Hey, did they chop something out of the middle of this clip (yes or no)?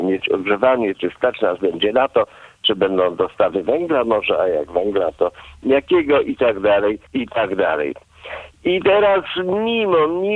yes